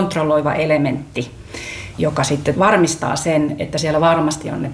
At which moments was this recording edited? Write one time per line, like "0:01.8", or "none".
0:01.9
0:02.5